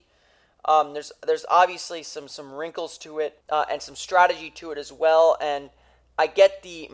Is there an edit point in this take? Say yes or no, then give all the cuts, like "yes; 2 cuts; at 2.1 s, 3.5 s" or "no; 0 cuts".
yes; 1 cut; at 3.4 s